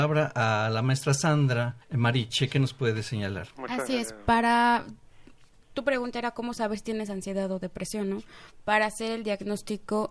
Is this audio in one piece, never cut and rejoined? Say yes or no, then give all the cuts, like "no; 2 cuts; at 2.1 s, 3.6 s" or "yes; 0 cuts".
no; 2 cuts; at 1.8 s, 3.5 s